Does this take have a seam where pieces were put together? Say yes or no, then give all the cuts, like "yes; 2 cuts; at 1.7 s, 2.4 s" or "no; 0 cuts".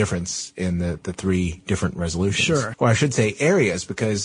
yes; 1 cut; at 2.7 s